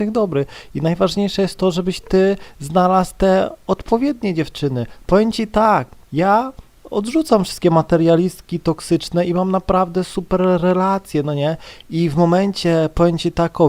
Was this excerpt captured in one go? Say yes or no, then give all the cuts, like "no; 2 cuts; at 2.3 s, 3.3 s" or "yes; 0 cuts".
no; 1 cut; at 6.0 s